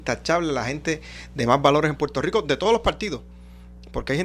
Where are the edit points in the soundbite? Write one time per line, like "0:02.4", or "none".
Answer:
none

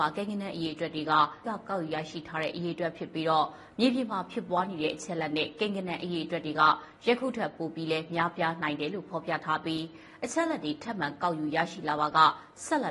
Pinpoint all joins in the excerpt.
0:01.4

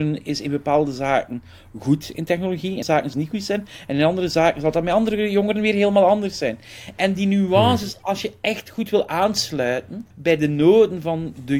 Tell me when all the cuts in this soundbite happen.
0:02.8
0:03.1
0:10.1

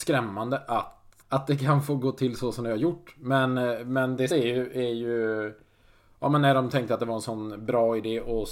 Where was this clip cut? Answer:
0:01.2
0:04.3

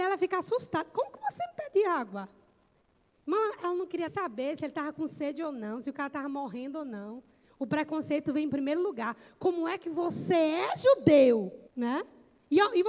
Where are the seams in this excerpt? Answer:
0:04.1
0:11.7

